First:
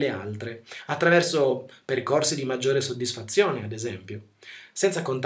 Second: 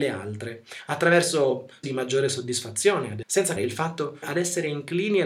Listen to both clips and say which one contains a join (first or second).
second